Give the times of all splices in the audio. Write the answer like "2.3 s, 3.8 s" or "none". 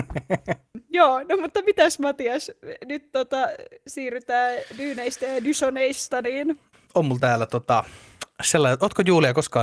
none